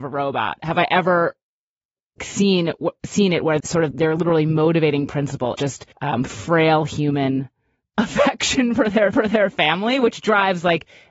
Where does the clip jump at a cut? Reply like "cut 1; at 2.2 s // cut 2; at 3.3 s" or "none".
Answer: cut 1; at 2.2 s // cut 2; at 3.6 s // cut 3; at 3.9 s // cut 4; at 5.6 s // cut 5; at 5.9 s // cut 6; at 9.1 s

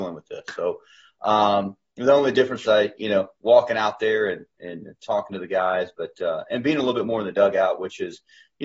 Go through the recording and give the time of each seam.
cut 1; at 2.6 s

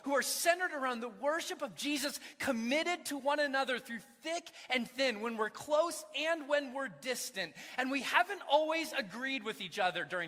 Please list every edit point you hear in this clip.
none

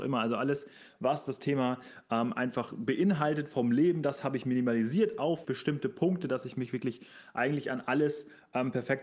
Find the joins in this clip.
cut 1; at 5.4 s

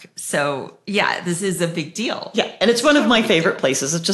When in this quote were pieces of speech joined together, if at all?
none

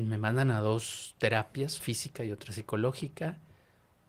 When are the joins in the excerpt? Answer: cut 1; at 1.8 s

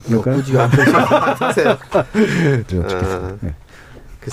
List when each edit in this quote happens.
cut 1; at 1.8 s // cut 2; at 2.7 s

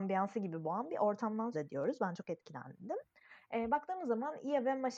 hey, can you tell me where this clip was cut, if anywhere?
cut 1; at 1.5 s

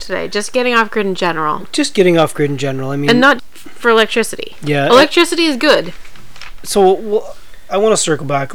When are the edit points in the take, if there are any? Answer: cut 1; at 3.4 s

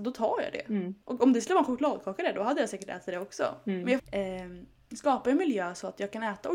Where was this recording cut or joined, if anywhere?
cut 1; at 4.0 s

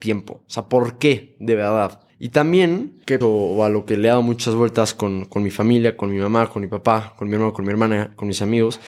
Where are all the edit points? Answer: cut 1; at 2.1 s // cut 2; at 3.2 s

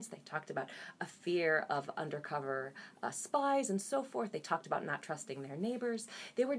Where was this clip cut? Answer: none

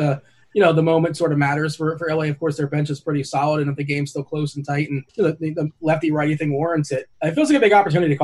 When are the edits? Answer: cut 1; at 5.1 s // cut 2; at 7.1 s

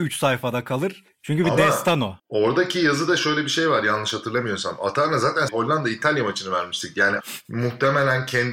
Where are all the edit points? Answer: cut 1; at 2.2 s // cut 2; at 5.5 s // cut 3; at 7.2 s

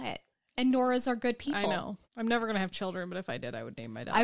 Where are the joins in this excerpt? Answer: cut 1; at 2.0 s

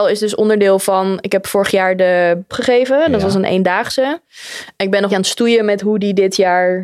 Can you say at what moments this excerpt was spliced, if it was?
cut 1; at 2.5 s // cut 2; at 5.1 s

